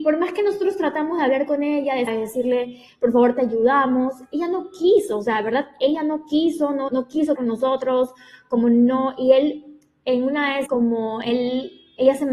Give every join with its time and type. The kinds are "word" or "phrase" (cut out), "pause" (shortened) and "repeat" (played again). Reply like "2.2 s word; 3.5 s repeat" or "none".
2.1 s word; 6.9 s word; 7.4 s word; 10.7 s word